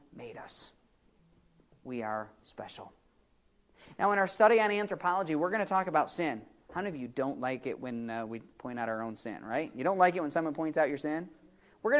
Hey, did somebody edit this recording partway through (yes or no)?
no